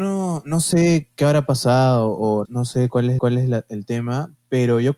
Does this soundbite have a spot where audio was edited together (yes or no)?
yes